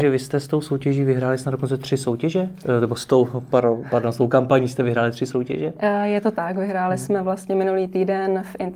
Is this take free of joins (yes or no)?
yes